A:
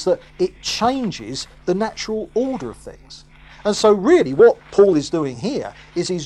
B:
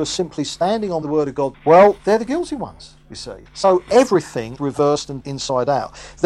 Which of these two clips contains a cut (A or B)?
B